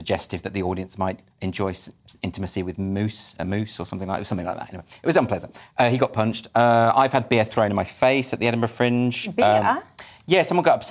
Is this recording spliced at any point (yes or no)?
yes